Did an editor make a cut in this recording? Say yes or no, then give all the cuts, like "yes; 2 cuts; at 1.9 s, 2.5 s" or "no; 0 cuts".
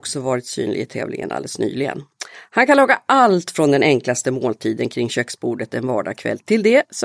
no; 0 cuts